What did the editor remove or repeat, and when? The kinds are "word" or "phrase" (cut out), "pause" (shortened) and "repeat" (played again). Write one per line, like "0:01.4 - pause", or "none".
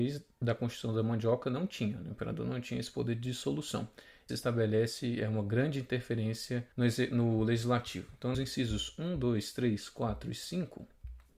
0:04.3 - phrase
0:06.7 - pause
0:08.3 - phrase